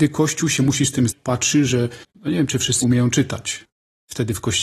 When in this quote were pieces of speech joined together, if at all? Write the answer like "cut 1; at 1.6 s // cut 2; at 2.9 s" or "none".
cut 1; at 1.1 s // cut 2; at 2.8 s